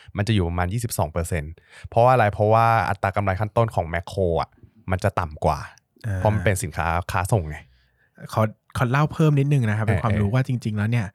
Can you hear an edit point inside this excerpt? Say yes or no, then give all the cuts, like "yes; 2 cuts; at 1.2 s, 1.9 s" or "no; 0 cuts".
no; 0 cuts